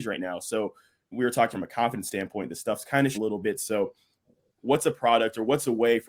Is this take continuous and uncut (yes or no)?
no